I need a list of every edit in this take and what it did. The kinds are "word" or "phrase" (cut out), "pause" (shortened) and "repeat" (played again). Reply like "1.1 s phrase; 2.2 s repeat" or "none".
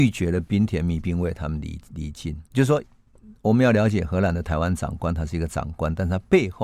2.5 s pause